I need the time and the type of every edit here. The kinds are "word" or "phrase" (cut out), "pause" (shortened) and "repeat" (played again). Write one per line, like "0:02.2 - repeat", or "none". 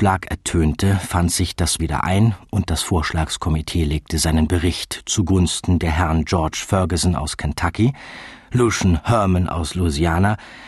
0:01.8 - word